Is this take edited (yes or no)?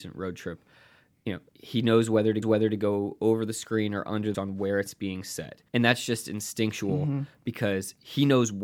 yes